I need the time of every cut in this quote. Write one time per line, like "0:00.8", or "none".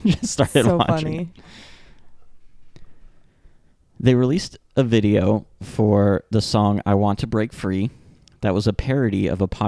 none